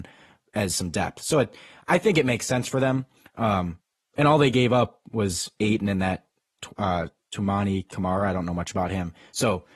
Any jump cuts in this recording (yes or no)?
no